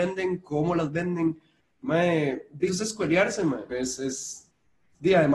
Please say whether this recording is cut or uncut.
cut